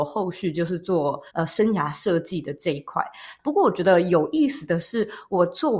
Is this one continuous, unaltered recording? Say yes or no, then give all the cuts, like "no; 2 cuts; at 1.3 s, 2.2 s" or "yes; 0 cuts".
no; 1 cut; at 1.3 s